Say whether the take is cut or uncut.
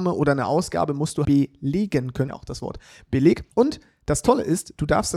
cut